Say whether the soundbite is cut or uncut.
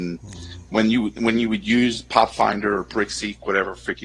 uncut